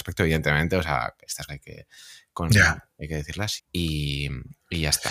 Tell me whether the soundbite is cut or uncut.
cut